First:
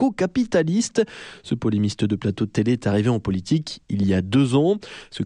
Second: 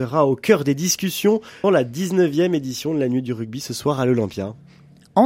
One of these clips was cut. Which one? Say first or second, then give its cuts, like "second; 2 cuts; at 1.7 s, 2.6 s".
second; 1 cut; at 1.6 s